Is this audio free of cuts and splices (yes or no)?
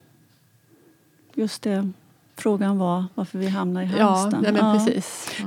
yes